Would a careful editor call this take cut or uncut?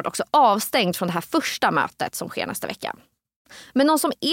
uncut